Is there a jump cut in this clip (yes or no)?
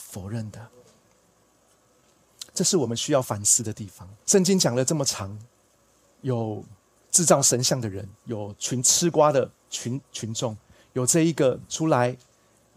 yes